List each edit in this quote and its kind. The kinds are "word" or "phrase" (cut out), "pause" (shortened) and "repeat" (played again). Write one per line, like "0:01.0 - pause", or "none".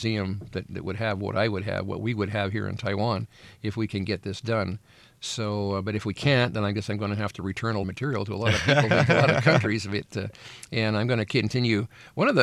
0:07.8 - phrase